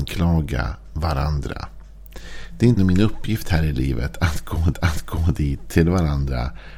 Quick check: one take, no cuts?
no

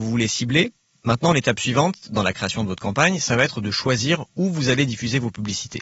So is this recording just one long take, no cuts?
yes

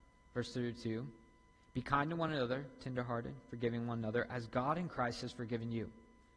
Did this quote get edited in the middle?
no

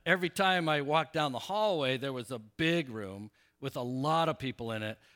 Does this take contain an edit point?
no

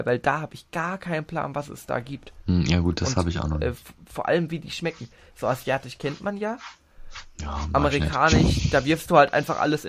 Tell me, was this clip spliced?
no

